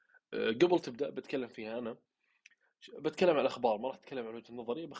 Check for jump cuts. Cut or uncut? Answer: uncut